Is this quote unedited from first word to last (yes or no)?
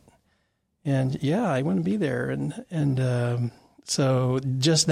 yes